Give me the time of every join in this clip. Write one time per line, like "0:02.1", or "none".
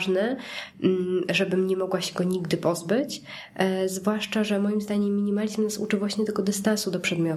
none

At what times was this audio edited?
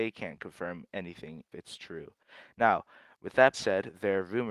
0:01.5
0:03.5

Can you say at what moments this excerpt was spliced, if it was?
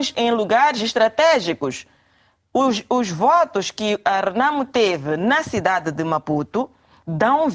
none

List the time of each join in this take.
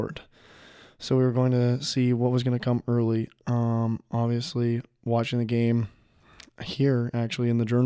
none

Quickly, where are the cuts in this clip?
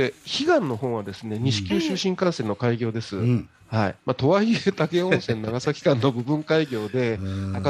0:04.0

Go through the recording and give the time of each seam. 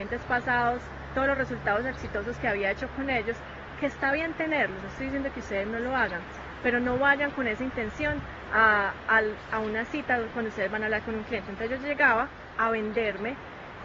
none

